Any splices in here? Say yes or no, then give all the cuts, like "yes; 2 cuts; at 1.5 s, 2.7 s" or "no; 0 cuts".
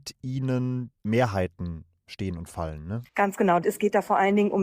yes; 2 cuts; at 0.9 s, 3.1 s